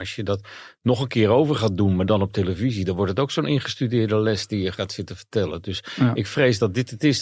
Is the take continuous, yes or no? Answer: yes